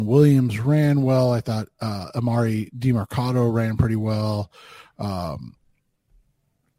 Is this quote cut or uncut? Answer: uncut